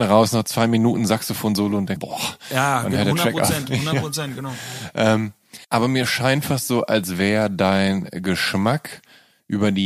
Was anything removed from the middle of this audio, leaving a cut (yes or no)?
yes